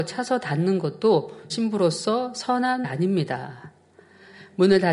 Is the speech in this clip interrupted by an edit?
yes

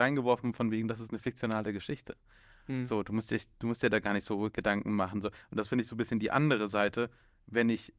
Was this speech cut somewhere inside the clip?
no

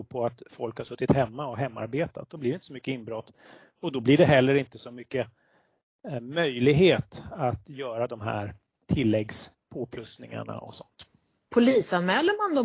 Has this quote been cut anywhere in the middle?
no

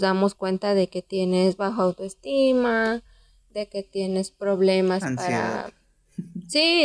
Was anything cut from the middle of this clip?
no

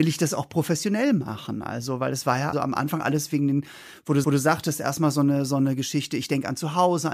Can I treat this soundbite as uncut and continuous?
no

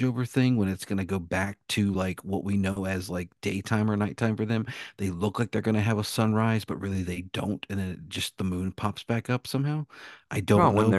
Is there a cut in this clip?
no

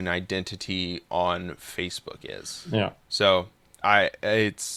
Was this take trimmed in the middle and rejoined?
yes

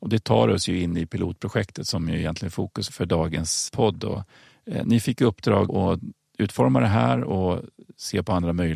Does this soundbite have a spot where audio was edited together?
yes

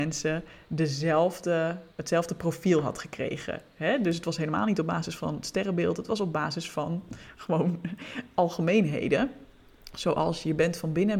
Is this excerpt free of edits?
no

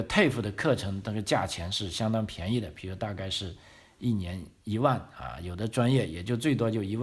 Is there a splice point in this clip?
no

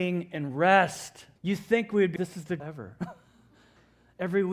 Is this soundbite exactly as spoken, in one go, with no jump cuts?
no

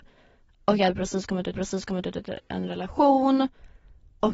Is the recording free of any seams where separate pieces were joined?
no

